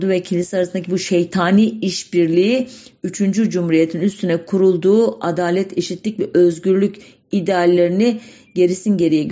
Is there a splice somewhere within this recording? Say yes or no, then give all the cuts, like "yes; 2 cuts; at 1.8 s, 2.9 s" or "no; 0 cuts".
no; 0 cuts